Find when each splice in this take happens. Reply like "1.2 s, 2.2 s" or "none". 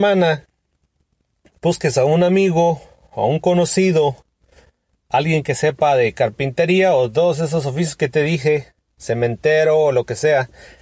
none